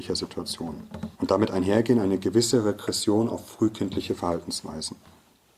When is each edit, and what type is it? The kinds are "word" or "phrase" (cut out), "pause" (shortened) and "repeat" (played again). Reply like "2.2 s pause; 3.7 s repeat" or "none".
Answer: 1.1 s pause